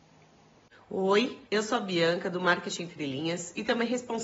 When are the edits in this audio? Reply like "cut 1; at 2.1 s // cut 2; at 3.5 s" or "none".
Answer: cut 1; at 1.5 s